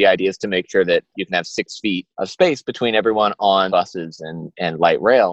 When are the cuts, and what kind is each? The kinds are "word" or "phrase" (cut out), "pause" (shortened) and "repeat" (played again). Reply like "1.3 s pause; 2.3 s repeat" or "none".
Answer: 1.1 s word; 2.1 s pause; 3.7 s phrase

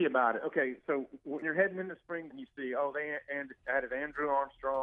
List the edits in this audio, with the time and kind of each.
1.4 s word; 2.3 s word

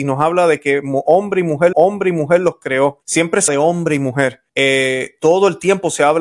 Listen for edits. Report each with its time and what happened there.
1.7 s repeat; 3.0 s pause; 3.5 s word; 4.5 s pause

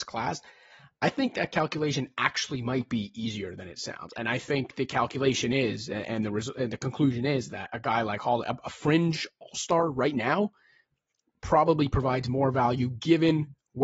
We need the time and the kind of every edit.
none

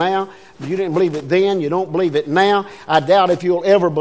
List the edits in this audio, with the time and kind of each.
none

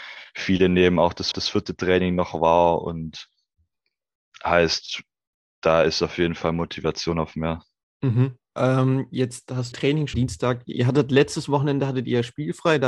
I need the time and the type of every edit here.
1.3 s repeat; 5.3 s pause; 8.4 s pause; 9.7 s word; 10.1 s phrase

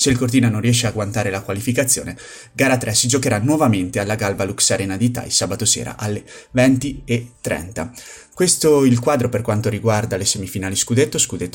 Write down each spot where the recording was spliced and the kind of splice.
none

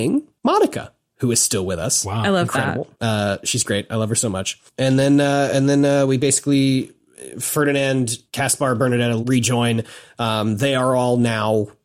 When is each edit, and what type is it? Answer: 2.9 s pause; 8.3 s pause; 9.2 s phrase

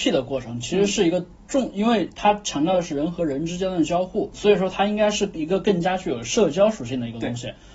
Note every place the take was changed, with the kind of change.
4.3 s word

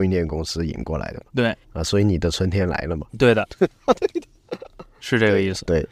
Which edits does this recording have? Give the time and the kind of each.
1.6 s pause; 3.1 s pause; 4.6 s word

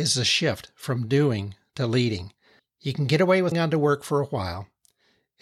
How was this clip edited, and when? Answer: 2.6 s pause; 3.5 s word

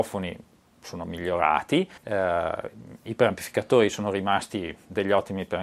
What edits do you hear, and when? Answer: 2.0 s pause

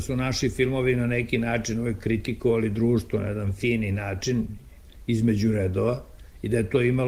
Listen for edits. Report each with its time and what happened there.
none

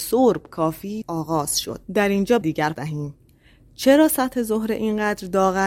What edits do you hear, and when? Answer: 1.0 s word; 1.8 s pause; 2.4 s phrase; 2.7 s word

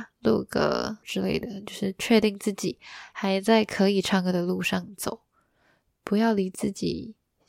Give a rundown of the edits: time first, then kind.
1.0 s word

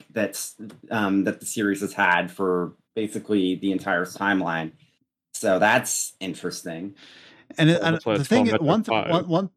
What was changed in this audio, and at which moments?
2.8 s pause; 4.1 s word

